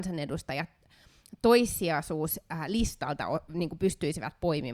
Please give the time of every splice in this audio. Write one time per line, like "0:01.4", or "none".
none